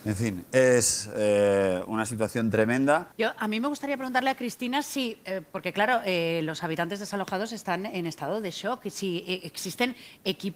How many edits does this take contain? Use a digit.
1